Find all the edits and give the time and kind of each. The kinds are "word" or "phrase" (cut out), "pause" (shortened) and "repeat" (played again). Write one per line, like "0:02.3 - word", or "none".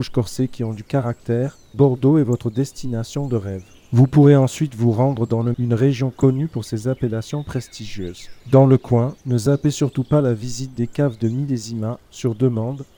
0:01.7 - word
0:03.7 - pause
0:05.5 - word
0:08.4 - pause
0:09.2 - pause

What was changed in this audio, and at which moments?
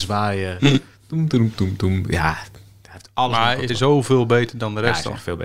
0:03.7 - phrase

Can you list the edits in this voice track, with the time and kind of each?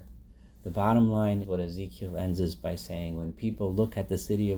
0:01.4 - word

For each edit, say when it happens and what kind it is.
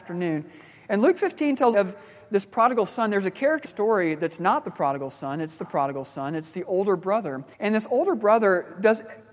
0:01.7 - phrase
0:03.6 - phrase
0:05.6 - repeat
0:07.5 - pause

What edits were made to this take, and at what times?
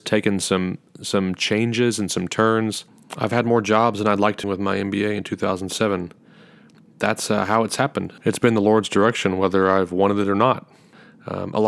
0:04.4 - phrase

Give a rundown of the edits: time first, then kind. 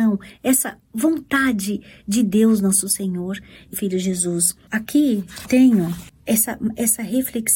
0:03.7 - phrase
0:05.4 - word

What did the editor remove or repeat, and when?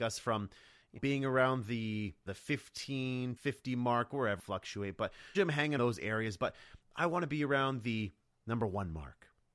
0:01.0 - word
0:02.3 - word
0:03.4 - word
0:04.4 - phrase
0:05.3 - word
0:05.8 - word

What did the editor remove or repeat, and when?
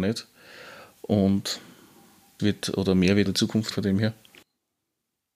0:02.4 - word
0:03.3 - phrase
0:03.7 - word

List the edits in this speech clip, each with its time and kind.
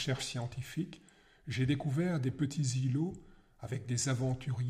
none

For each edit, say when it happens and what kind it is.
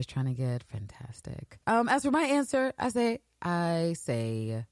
0:01.6 - pause

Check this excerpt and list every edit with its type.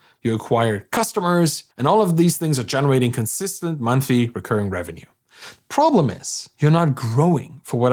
0:01.7 - pause

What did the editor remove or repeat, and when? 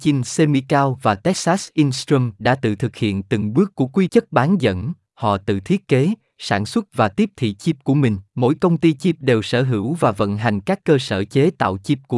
0:04.1 - phrase
0:08.3 - pause

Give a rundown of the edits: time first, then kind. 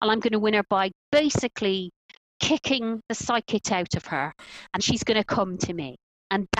0:03.6 - word
0:04.8 - word

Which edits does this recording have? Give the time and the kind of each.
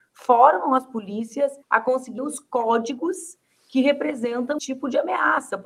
0:01.6 - pause
0:02.2 - word
0:04.6 - word

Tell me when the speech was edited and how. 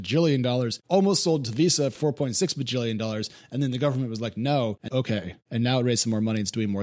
0:01.9 - word
0:04.9 - phrase

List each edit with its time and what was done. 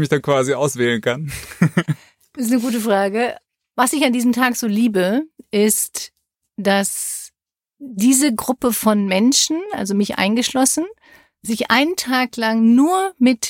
none

